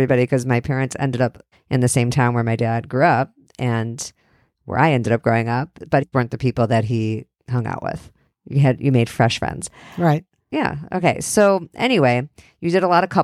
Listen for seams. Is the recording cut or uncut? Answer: cut